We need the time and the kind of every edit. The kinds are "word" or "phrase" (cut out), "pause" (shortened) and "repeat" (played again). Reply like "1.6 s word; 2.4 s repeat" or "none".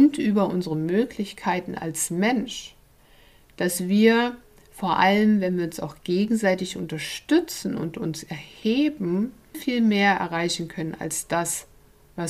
9.5 s word